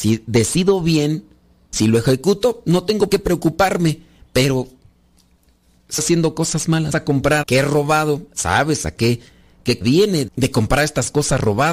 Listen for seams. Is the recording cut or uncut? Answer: cut